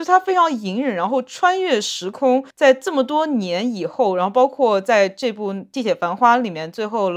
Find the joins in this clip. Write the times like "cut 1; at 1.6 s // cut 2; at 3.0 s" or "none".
cut 1; at 2.5 s